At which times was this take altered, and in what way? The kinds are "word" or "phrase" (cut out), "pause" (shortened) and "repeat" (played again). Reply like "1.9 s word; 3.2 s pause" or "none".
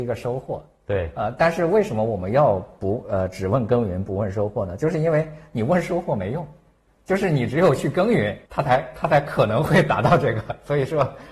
8.5 s pause